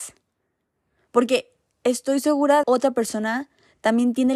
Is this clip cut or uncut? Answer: cut